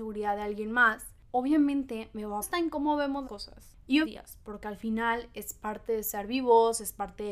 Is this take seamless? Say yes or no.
no